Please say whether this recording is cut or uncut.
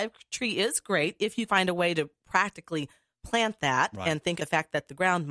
cut